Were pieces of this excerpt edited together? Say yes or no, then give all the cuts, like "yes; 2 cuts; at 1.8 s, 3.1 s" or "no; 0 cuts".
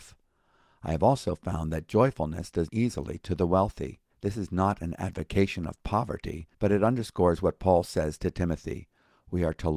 yes; 3 cuts; at 2.7 s, 4.1 s, 6.5 s